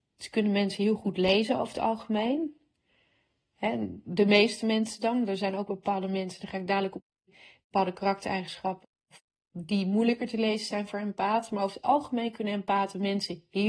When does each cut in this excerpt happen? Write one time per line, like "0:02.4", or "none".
none

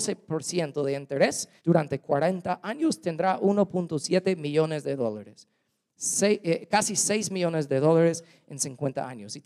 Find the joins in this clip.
0:01.6

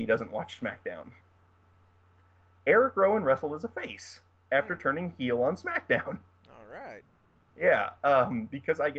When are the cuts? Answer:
none

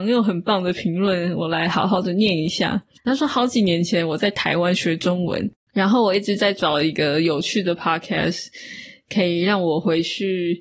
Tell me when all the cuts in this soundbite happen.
0:03.0

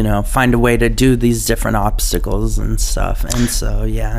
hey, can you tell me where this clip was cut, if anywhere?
none

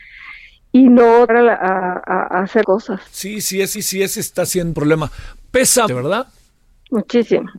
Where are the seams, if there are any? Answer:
0:01.3
0:02.6
0:03.1
0:03.7
0:04.7
0:05.9

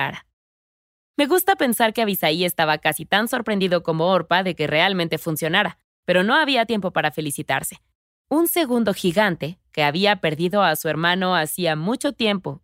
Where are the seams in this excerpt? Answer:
none

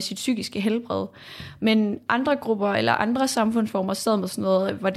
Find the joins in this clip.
none

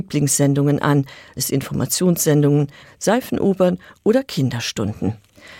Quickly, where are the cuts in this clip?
0:01.4
0:02.8

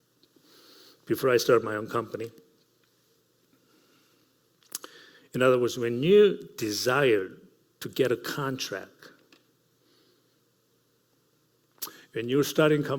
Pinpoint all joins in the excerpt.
none

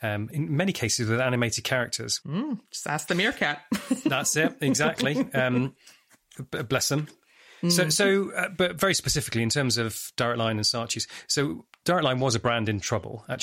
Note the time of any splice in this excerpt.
none

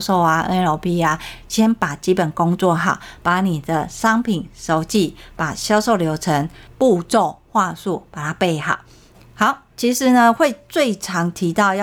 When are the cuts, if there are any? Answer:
none

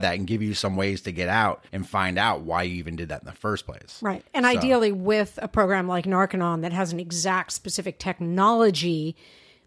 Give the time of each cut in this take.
0:01.7

